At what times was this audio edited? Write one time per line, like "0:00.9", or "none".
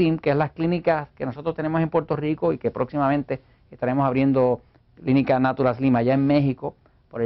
none